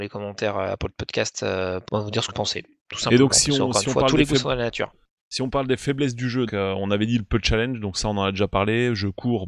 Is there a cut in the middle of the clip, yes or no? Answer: yes